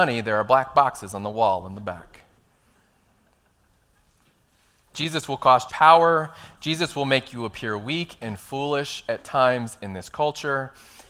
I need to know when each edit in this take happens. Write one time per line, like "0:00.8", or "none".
0:05.7

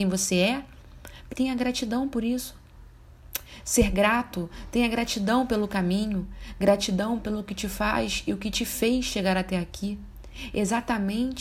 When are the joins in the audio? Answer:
0:01.3

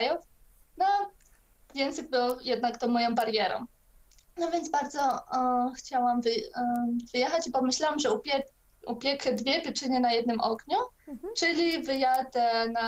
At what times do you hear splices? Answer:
none

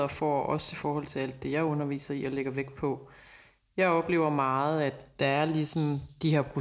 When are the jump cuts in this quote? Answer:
none

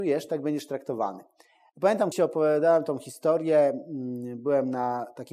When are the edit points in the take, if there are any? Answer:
0:02.1

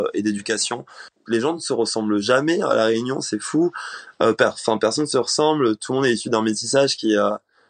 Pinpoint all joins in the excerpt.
none

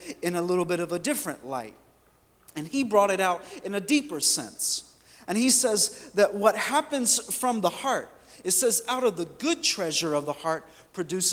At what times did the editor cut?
none

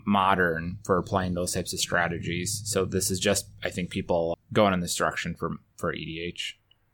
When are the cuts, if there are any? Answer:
0:04.3

